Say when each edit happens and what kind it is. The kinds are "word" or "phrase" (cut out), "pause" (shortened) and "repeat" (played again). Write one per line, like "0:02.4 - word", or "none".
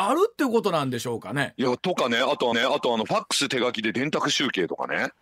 0:02.5 - repeat